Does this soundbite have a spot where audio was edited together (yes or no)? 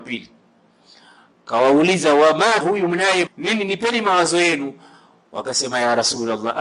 yes